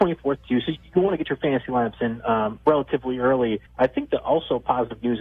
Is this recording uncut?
no; 1 cut; at 3.7 s

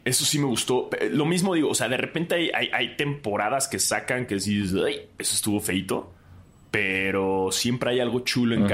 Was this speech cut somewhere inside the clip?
no; 0 cuts

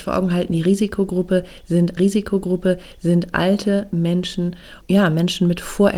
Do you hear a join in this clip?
yes; 2 cuts; at 2.0 s, 4.8 s

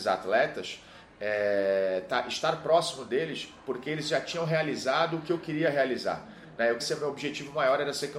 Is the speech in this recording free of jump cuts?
no; 1 cut; at 6.8 s

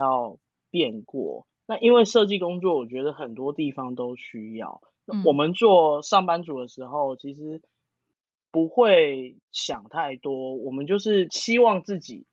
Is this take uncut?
yes; 0 cuts

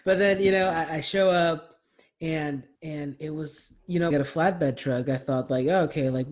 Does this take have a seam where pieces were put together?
yes; 2 cuts; at 2.8 s, 4.1 s

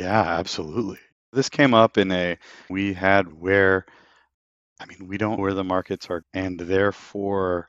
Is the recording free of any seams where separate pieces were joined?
no; 5 cuts; at 1.1 s, 2.7 s, 3.3 s, 5.4 s, 6.2 s

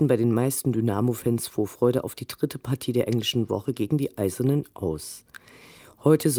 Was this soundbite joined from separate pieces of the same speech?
no; 0 cuts

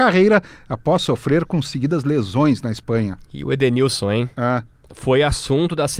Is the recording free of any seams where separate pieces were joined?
yes; 0 cuts

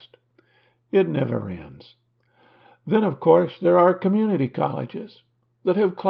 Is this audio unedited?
yes; 0 cuts

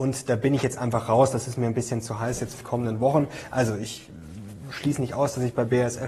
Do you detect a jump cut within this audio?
yes; 1 cut; at 2.6 s

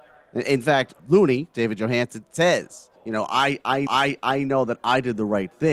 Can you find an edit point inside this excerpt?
yes; 3 cuts; at 1.0 s, 3.0 s, 3.9 s

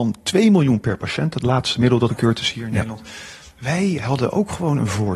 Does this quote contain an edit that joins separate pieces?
yes; 1 cut; at 2.1 s

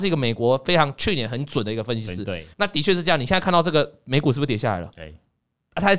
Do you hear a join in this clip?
yes; 1 cut; at 2.5 s

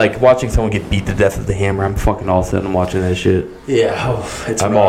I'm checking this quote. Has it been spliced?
no; 0 cuts

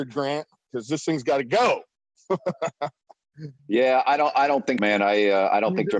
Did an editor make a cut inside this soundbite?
yes; 2 cuts; at 3.6 s, 4.8 s

